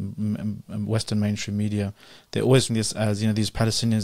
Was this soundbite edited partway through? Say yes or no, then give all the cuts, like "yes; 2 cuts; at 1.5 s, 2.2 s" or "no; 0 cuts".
yes; 1 cut; at 2.7 s